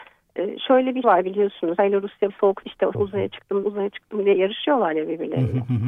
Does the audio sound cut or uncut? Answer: cut